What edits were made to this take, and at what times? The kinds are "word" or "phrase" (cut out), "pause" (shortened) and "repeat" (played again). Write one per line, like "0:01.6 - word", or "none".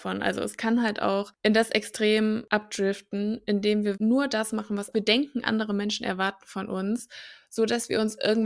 0:03.9 - word
0:04.9 - phrase